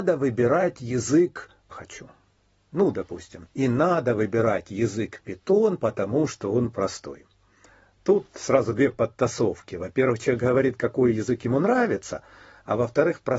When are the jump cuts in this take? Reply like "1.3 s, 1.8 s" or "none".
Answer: 1.7 s, 3.5 s